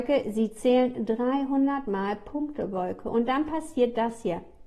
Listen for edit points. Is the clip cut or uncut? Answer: uncut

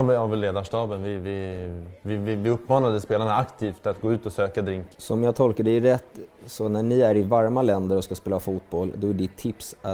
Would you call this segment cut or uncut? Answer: cut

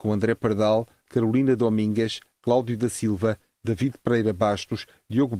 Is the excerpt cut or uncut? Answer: uncut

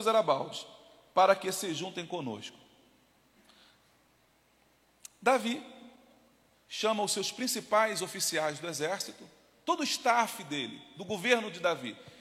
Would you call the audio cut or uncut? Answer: uncut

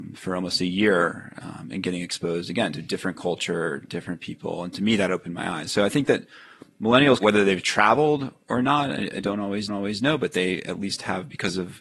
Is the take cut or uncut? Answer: cut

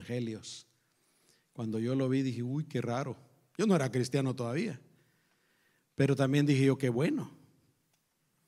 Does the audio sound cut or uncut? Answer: uncut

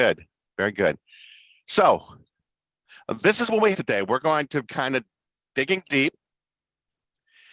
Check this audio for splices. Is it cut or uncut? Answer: cut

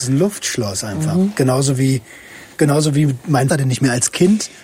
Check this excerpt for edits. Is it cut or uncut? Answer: cut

